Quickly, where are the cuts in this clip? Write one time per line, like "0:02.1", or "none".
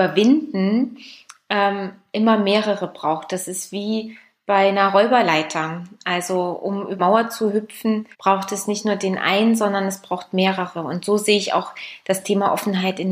0:07.0
0:08.1